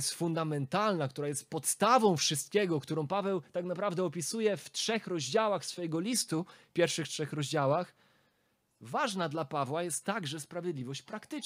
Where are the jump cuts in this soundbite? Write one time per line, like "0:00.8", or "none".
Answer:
none

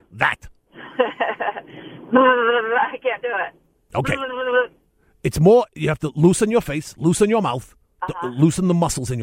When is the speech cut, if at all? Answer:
0:07.8

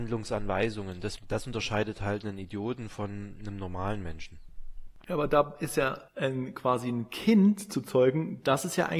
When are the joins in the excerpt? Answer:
0:06.1

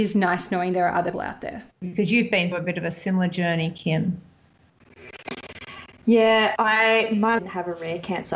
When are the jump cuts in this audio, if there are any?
0:01.1
0:01.7
0:02.5
0:06.6
0:07.4

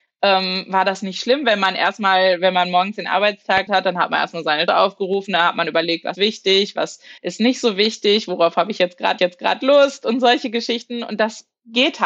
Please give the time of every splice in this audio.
0:03.7
0:04.7
0:06.1
0:07.2
0:09.2

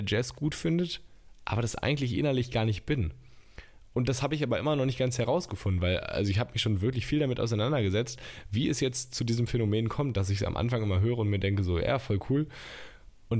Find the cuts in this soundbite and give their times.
none

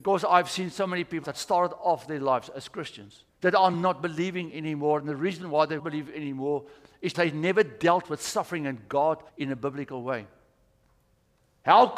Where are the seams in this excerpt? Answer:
0:01.2
0:03.3
0:03.7
0:05.8
0:07.1
0:09.3

